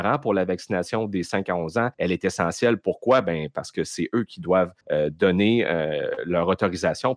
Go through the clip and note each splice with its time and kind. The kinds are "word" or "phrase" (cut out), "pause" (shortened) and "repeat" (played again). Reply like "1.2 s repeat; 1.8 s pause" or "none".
1.9 s pause; 4.8 s pause